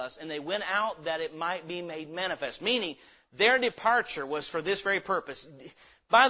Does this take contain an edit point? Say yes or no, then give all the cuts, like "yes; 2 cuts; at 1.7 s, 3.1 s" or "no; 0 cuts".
no; 0 cuts